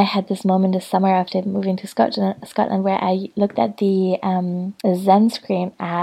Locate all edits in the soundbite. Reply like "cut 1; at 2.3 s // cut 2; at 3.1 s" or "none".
cut 1; at 4.8 s